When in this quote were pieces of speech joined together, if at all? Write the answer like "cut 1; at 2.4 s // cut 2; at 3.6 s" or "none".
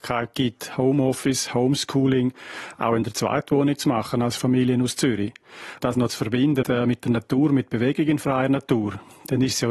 cut 1; at 5.8 s // cut 2; at 6.6 s